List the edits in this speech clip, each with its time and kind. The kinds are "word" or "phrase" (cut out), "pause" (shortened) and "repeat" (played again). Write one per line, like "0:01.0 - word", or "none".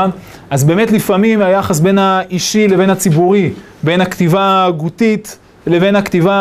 none